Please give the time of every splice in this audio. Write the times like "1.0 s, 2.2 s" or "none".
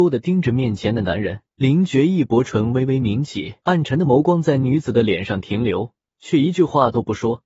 1.5 s, 3.6 s, 6.0 s